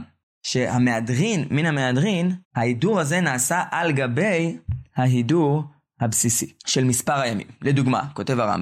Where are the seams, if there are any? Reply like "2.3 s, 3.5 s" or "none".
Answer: 2.4 s, 6.6 s